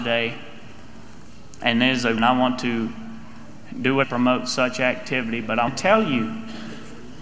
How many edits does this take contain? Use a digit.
3